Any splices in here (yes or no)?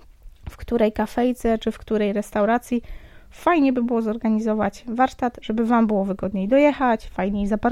no